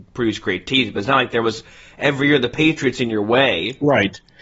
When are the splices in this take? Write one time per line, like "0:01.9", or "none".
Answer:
none